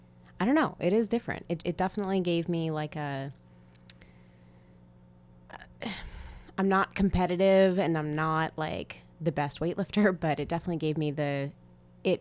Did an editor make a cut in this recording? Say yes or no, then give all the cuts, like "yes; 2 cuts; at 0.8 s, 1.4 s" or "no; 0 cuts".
yes; 1 cut; at 1.6 s